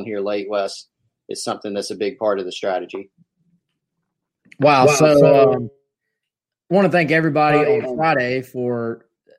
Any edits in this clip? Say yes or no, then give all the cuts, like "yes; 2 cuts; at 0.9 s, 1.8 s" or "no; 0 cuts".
no; 0 cuts